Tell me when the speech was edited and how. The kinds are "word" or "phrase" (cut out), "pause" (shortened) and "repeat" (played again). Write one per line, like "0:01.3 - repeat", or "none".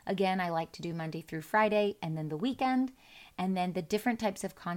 none